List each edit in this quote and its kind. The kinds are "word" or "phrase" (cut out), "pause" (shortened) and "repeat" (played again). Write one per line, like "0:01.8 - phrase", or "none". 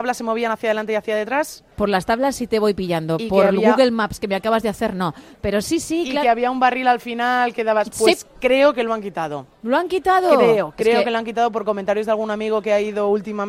0:01.7 - pause